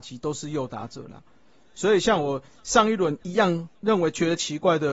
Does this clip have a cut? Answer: no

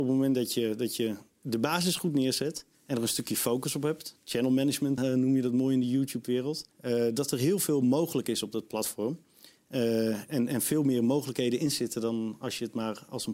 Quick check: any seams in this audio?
yes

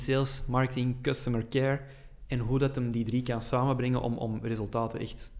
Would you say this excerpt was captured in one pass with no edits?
yes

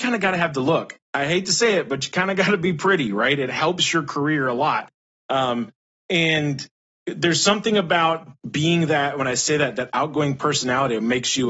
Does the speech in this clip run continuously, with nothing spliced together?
yes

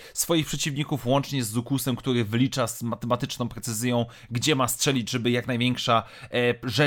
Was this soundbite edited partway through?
no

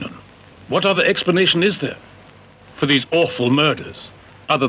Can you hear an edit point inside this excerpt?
no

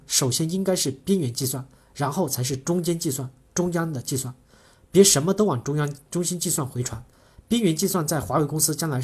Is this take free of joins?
yes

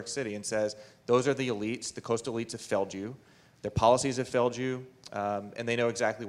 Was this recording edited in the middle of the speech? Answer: no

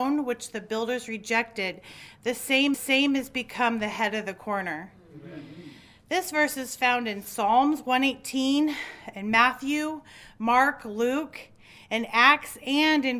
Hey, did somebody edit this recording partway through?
yes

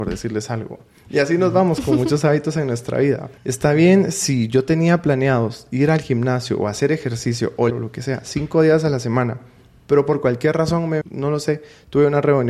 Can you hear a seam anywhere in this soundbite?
yes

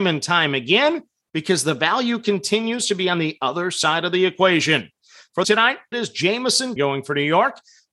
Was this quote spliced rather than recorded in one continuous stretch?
yes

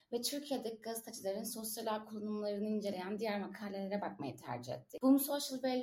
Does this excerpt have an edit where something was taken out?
no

